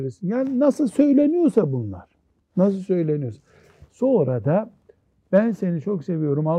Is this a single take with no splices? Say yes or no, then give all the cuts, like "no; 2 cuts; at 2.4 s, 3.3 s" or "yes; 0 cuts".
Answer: yes; 0 cuts